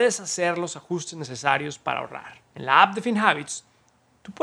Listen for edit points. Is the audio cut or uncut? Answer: cut